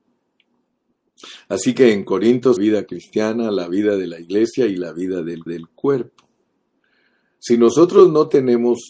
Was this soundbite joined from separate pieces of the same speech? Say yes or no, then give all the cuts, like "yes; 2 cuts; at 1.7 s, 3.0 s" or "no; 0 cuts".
yes; 2 cuts; at 2.6 s, 5.5 s